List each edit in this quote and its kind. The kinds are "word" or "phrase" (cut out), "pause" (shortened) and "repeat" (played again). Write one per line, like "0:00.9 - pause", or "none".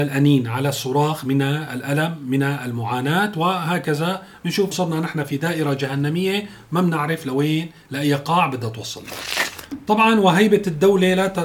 0:04.7 - word